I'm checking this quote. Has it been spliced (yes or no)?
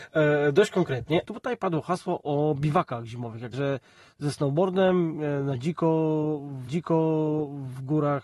yes